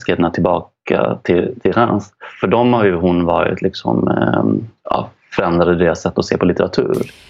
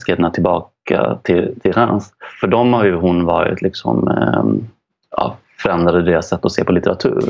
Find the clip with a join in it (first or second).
first